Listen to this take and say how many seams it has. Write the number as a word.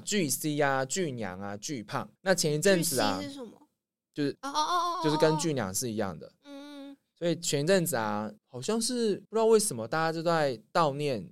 four